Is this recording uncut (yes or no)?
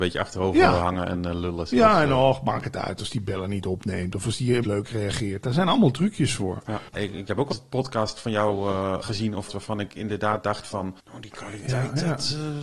no